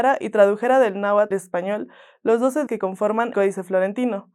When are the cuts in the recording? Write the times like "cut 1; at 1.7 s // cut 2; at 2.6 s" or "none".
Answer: cut 1; at 1.3 s // cut 2; at 2.7 s // cut 3; at 3.3 s